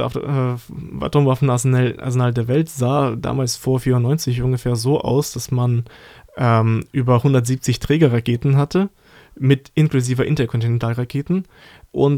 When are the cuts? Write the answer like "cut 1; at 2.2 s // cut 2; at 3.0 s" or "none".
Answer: none